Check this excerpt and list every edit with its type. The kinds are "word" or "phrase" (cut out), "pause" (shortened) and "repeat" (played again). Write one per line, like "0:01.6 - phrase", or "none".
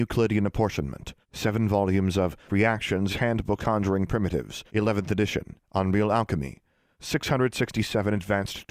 0:01.2 - pause
0:02.5 - word
0:03.1 - phrase
0:03.6 - word
0:04.7 - pause
0:05.6 - pause